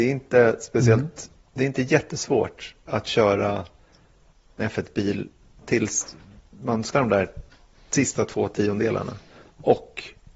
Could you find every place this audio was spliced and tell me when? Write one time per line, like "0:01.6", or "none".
0:04.6
0:05.6
0:06.9